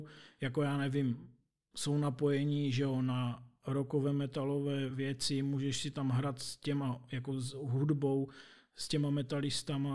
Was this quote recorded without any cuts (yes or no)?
yes